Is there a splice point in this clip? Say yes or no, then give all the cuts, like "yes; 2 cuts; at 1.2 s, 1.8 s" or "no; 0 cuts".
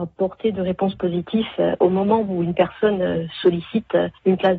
no; 0 cuts